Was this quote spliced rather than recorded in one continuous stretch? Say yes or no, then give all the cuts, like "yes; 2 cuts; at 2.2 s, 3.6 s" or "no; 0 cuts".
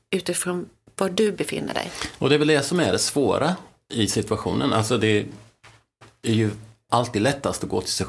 no; 0 cuts